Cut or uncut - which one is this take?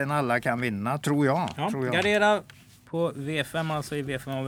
uncut